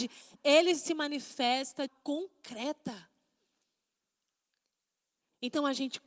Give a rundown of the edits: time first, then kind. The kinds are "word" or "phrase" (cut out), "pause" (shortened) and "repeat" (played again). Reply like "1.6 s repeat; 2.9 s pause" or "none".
1.9 s phrase